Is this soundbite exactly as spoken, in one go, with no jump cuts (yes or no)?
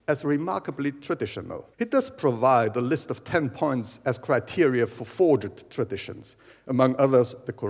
no